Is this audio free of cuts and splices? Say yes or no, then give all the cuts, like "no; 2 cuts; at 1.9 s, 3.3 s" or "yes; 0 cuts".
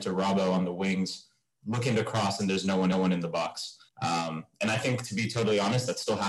no; 2 cuts; at 2.9 s, 3.9 s